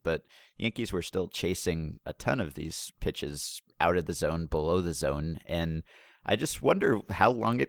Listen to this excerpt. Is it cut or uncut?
uncut